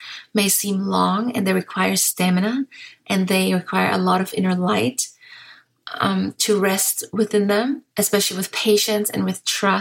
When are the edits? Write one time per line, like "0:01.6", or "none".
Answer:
0:07.9